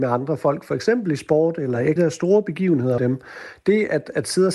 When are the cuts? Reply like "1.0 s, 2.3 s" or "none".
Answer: 2.0 s, 3.0 s

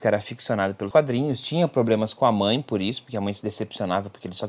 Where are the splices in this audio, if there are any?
0.9 s

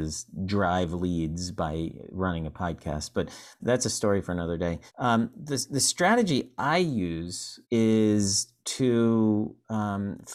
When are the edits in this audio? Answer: 3.6 s, 4.9 s, 7.6 s

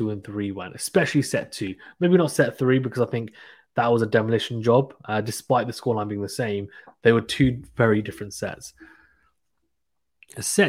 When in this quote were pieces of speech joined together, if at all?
none

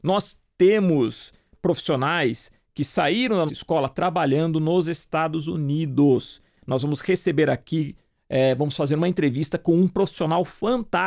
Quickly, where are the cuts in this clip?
3.5 s

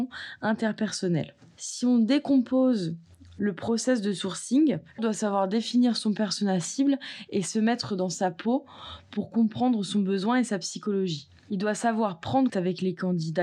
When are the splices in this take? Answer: 5.0 s, 12.5 s

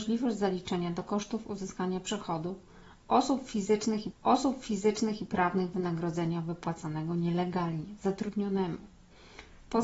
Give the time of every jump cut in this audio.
4.1 s

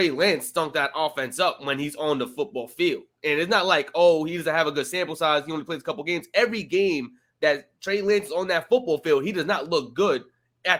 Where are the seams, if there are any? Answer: none

